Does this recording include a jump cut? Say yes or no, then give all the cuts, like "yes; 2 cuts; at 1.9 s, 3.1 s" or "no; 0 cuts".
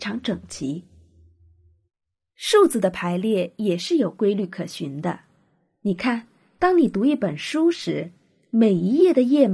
no; 0 cuts